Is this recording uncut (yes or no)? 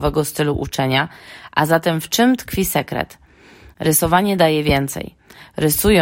yes